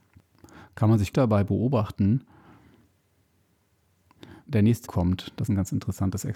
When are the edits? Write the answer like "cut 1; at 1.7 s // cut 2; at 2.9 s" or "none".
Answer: cut 1; at 1.1 s // cut 2; at 4.5 s // cut 3; at 4.9 s // cut 4; at 5.5 s